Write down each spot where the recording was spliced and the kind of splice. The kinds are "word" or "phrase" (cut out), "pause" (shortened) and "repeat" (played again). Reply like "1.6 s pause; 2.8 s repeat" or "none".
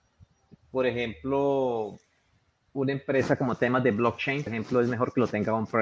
4.5 s word